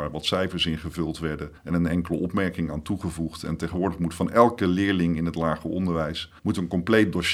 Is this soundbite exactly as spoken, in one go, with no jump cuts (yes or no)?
no